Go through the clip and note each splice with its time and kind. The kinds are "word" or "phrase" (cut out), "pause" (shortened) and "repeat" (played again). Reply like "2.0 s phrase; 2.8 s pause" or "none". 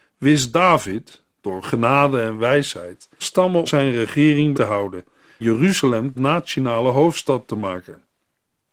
1.6 s word; 3.2 s word; 3.7 s word; 4.5 s word; 5.4 s word; 6.1 s word